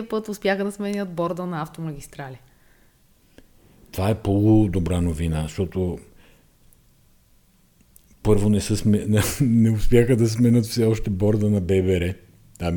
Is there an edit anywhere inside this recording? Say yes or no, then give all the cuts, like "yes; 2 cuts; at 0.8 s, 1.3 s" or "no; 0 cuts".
no; 0 cuts